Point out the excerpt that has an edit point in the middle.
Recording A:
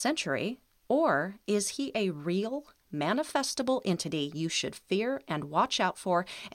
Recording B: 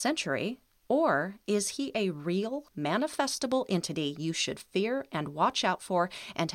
B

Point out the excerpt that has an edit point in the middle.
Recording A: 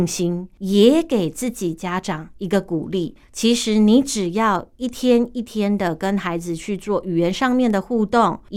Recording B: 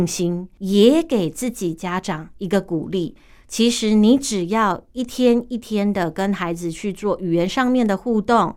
A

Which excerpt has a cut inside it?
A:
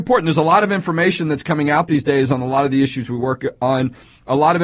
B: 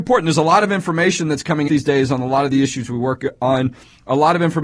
B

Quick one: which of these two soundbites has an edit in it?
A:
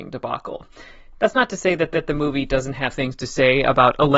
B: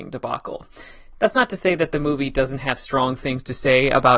A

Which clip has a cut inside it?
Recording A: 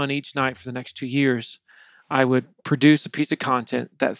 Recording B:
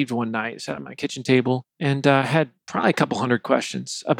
B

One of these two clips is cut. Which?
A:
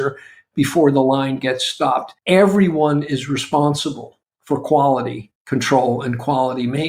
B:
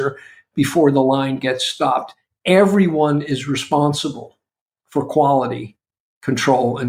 A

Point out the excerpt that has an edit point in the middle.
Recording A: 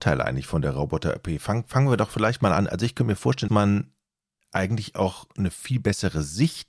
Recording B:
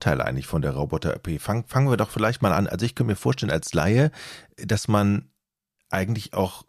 A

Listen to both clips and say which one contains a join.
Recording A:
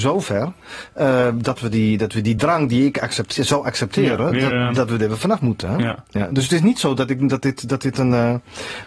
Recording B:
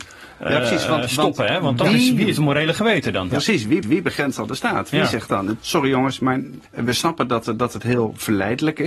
B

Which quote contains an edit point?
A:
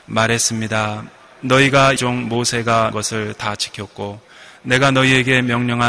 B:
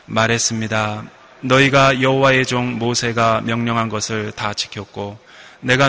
A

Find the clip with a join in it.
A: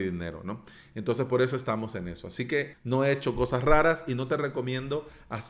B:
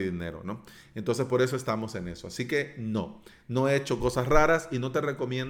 A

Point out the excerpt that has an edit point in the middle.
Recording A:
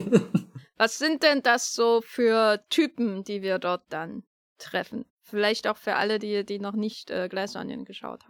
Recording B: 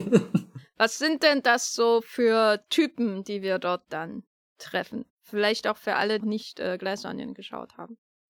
B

